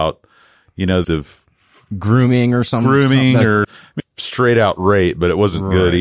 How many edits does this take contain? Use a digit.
3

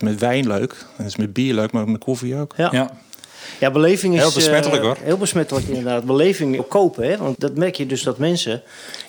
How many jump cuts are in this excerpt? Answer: 2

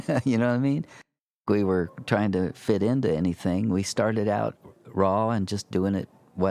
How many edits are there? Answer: 1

